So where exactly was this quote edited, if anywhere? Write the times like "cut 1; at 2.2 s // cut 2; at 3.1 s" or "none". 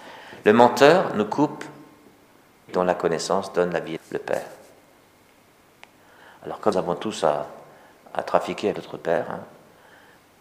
cut 1; at 2.7 s // cut 2; at 4.0 s // cut 3; at 6.7 s // cut 4; at 8.1 s // cut 5; at 8.7 s